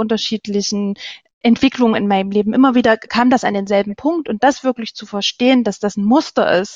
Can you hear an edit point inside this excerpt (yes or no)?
no